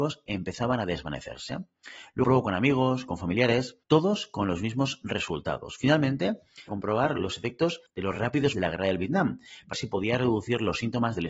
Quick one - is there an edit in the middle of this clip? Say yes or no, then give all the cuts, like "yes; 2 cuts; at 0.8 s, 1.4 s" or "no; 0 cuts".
yes; 6 cuts; at 2.2 s, 3.8 s, 6.7 s, 7.9 s, 8.5 s, 9.7 s